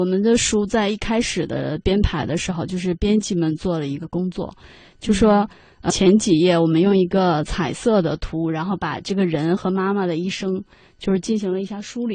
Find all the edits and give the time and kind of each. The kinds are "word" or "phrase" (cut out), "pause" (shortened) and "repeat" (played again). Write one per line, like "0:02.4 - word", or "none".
0:05.9 - word